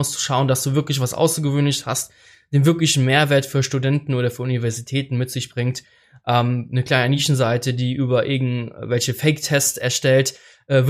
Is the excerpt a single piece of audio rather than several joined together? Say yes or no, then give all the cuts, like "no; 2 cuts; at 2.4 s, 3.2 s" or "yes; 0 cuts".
yes; 0 cuts